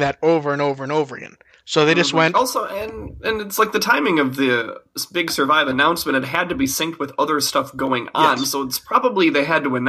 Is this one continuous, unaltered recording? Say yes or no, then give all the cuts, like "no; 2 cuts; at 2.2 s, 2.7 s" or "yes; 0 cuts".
yes; 0 cuts